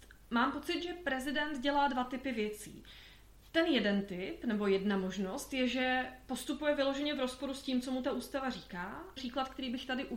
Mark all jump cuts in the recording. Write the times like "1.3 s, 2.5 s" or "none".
9.2 s